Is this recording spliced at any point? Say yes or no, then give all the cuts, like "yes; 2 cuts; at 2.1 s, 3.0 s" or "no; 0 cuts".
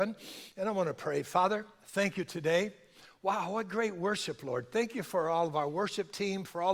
no; 0 cuts